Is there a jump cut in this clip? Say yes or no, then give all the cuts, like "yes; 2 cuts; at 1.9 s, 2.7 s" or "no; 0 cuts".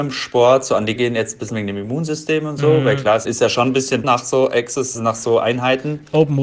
yes; 5 cuts; at 1.0 s, 1.5 s, 3.2 s, 4.0 s, 4.9 s